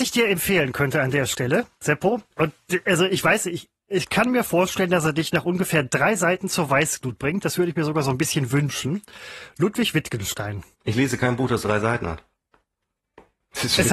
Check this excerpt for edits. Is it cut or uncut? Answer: cut